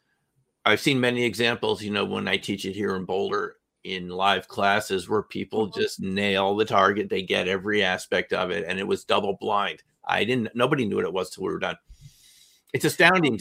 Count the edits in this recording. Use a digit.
0